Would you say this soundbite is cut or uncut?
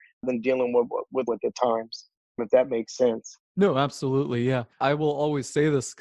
cut